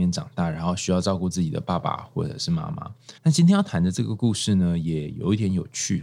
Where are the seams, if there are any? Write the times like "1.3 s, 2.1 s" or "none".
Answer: 3.2 s